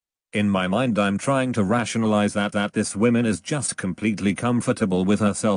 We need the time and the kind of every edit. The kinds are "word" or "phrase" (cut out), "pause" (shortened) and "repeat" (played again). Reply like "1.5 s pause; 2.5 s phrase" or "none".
2.5 s repeat